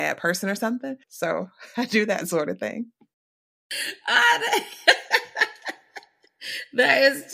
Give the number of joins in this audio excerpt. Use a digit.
1